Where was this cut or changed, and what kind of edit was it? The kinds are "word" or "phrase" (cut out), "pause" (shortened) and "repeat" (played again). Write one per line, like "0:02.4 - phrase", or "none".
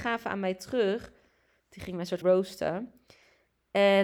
0:02.2 - word